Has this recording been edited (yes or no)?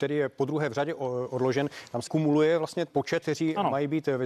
yes